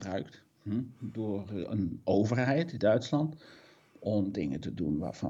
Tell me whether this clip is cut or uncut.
cut